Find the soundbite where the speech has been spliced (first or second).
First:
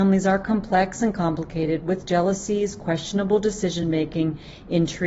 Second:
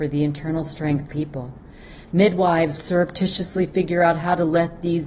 second